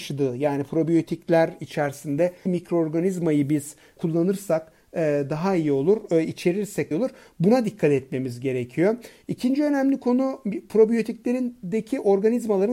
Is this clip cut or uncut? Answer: cut